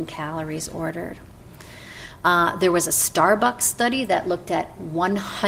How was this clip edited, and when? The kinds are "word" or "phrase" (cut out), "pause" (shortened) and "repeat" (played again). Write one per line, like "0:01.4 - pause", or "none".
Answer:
none